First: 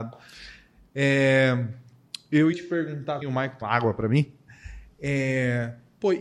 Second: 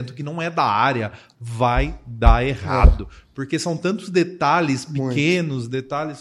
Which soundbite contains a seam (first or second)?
first